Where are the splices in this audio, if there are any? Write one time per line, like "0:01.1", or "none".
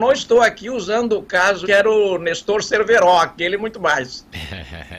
0:01.6
0:03.6